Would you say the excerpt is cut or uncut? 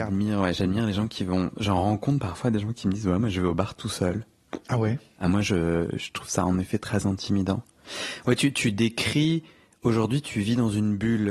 uncut